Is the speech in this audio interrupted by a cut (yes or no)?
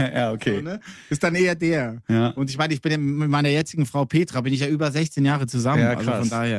no